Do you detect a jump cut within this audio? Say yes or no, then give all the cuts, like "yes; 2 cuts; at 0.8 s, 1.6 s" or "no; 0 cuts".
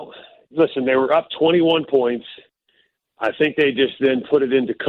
no; 0 cuts